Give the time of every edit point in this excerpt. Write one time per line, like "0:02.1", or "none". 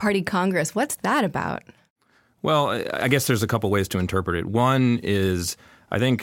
none